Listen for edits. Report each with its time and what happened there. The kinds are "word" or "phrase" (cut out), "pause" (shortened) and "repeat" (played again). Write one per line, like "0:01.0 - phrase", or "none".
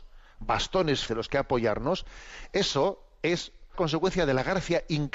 0:01.1 - word
0:03.7 - word